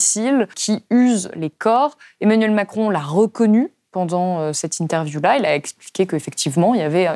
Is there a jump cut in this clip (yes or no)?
no